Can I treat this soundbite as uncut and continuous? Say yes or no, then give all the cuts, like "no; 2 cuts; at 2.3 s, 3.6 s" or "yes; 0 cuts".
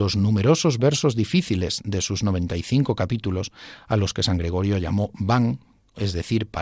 yes; 0 cuts